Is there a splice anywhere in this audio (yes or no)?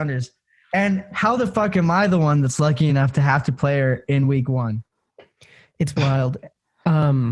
no